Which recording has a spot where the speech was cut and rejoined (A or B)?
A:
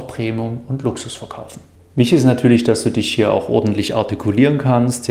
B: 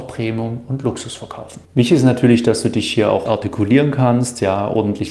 B